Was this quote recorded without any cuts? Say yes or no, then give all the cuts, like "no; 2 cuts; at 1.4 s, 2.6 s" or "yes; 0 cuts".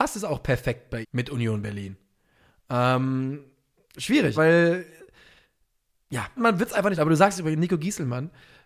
no; 4 cuts; at 1.0 s, 4.3 s, 6.4 s, 7.0 s